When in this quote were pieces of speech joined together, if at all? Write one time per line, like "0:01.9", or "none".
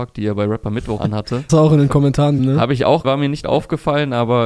0:01.0
0:01.5
0:02.4
0:03.0
0:03.4